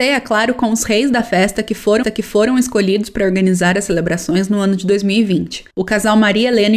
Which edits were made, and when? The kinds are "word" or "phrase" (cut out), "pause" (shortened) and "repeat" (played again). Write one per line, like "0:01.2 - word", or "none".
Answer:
0:02.0 - repeat